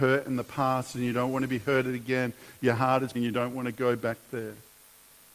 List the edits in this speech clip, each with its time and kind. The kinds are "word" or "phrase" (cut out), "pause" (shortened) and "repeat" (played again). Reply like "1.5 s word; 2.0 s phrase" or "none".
3.1 s phrase